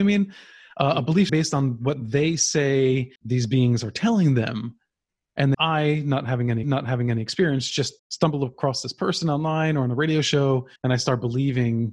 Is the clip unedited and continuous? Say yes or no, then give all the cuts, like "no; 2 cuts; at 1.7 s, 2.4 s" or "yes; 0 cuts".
no; 6 cuts; at 1.3 s, 3.2 s, 5.5 s, 6.6 s, 8.0 s, 10.8 s